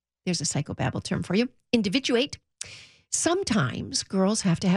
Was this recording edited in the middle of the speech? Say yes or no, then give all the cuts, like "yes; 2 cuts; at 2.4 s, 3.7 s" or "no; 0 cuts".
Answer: no; 0 cuts